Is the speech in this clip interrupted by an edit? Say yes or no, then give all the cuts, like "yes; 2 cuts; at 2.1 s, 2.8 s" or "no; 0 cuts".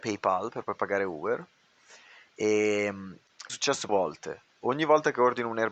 yes; 2 cuts; at 3.5 s, 3.9 s